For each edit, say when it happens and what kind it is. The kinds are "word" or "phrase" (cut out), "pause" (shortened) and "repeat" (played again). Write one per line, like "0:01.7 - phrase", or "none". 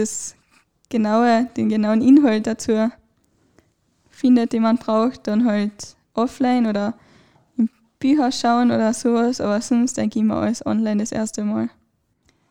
none